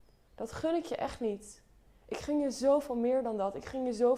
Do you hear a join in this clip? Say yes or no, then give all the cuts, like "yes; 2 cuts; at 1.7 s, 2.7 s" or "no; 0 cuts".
no; 0 cuts